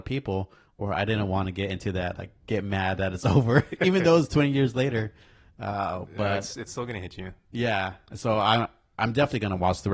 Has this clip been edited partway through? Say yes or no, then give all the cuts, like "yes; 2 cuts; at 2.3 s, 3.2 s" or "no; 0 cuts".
no; 0 cuts